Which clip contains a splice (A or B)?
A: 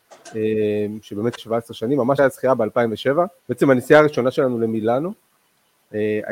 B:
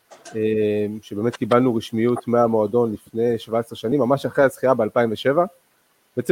A